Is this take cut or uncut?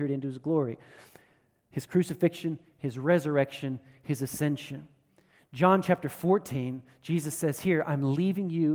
uncut